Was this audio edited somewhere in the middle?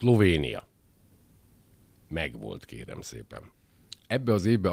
no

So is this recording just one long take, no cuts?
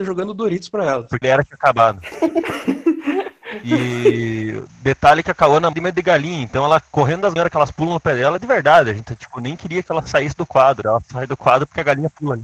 no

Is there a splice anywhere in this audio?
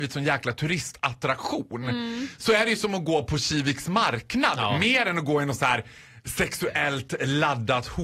no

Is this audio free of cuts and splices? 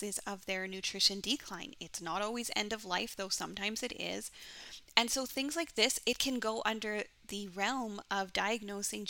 yes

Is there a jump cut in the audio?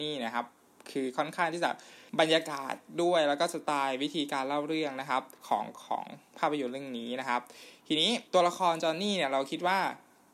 yes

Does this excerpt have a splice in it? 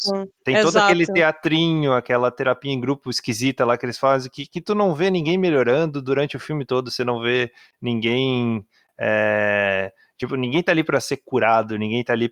no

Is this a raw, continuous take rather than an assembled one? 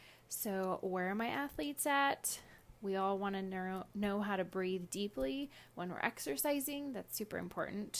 yes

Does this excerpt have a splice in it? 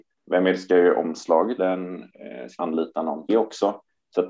yes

